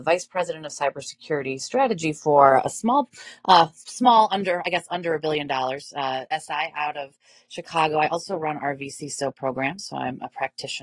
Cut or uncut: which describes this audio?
uncut